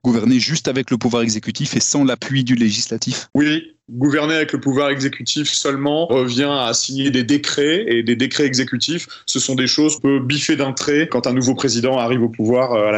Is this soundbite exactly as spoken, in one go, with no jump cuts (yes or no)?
no